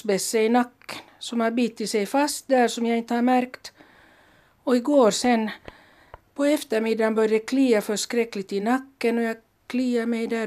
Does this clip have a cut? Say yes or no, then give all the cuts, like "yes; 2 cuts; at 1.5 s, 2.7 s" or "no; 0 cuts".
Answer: no; 0 cuts